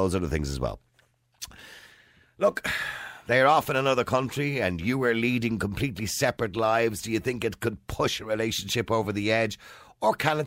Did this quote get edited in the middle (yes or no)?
no